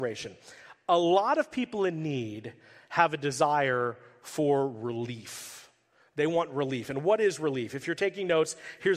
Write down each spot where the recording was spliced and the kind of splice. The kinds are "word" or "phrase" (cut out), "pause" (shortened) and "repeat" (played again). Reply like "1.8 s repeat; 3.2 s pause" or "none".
none